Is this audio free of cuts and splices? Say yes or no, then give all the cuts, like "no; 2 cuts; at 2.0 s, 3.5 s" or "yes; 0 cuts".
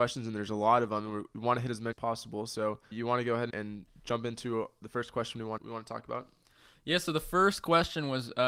no; 4 cuts; at 1.9 s, 2.9 s, 3.5 s, 5.6 s